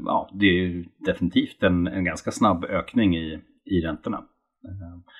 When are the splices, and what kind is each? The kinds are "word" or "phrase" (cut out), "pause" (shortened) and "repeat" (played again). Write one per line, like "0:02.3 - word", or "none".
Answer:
none

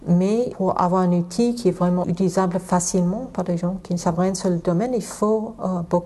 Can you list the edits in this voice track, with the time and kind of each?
none

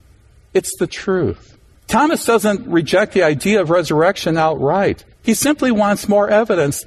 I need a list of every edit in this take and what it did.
0:01.7 - pause
0:05.1 - pause

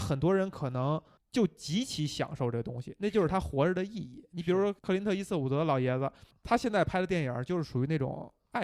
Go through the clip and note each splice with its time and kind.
0:01.2 - pause
0:04.8 - pause
0:06.3 - word

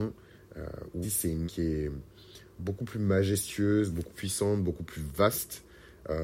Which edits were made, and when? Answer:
0:01.0 - word
0:01.5 - word
0:04.1 - word

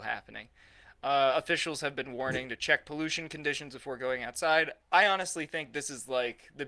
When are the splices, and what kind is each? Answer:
none

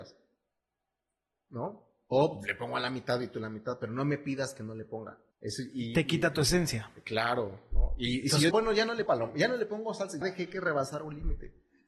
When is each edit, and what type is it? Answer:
0:05.3 - pause
0:08.5 - word
0:09.1 - word
0:10.2 - word

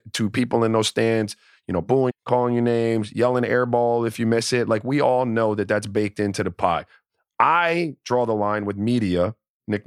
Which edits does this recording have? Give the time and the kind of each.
0:02.1 - word

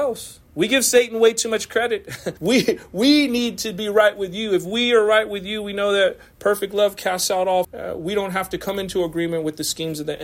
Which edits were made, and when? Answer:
0:02.4 - pause
0:07.6 - phrase

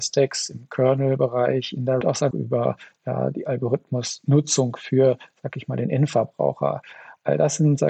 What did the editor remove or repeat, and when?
0:02.0 - phrase
0:02.3 - phrase

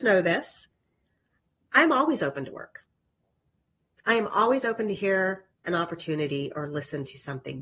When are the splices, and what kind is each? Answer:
none

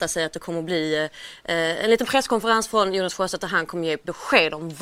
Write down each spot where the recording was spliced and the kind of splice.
none

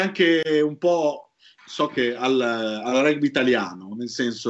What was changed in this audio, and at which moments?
none

